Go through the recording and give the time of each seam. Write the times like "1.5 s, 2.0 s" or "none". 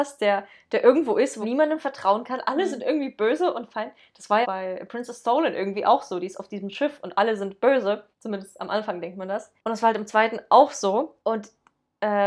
1.4 s, 4.4 s, 8.1 s, 9.6 s, 11.2 s